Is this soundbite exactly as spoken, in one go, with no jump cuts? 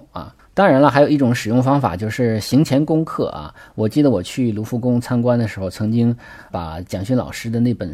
no; 1 cut; at 6.5 s

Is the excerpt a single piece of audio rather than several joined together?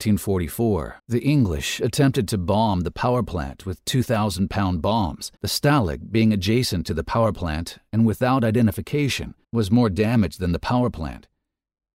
no; 3 cuts; at 1.0 s, 5.4 s, 9.4 s

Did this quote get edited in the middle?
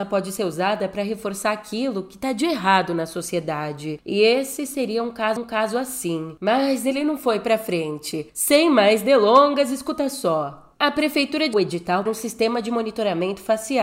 yes; 4 cuts; at 5.4 s, 8.3 s, 11.5 s, 12.1 s

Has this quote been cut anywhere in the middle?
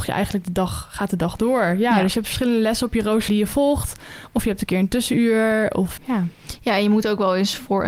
yes; 2 cuts; at 3.3 s, 6.0 s

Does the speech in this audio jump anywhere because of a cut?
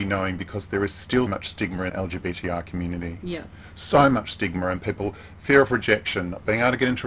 yes; 2 cuts; at 1.3 s, 1.9 s

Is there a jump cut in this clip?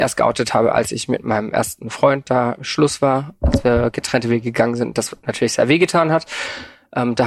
no; 0 cuts

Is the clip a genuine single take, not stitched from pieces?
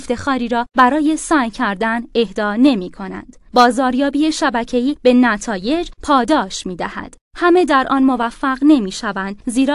no; 1 cut; at 7.2 s

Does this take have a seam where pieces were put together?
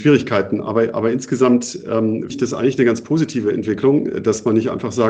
yes; 1 cut; at 2.3 s

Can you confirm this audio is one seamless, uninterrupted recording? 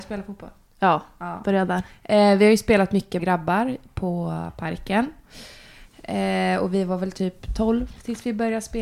no; 1 cut; at 3.2 s

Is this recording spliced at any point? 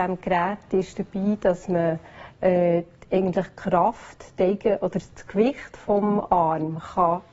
no; 0 cuts

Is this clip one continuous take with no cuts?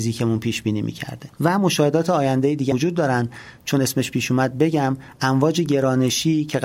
no; 1 cut; at 2.7 s

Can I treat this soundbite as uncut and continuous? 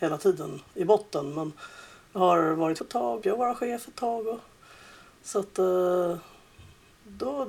no; 2 cuts; at 2.8 s, 3.2 s

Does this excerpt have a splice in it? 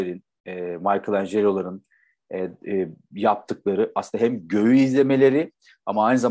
no; 0 cuts

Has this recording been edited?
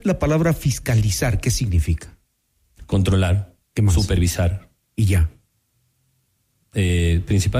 yes; 1 cut; at 3.7 s

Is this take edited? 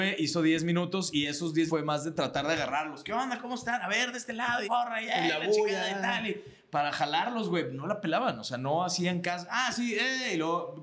yes; 3 cuts; at 1.1 s, 1.7 s, 4.6 s

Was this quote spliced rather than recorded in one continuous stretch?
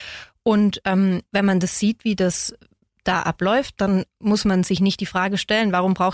no; 0 cuts

